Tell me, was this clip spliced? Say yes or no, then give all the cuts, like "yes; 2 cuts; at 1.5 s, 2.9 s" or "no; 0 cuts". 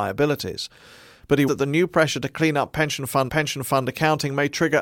yes; 2 cuts; at 1.5 s, 3.3 s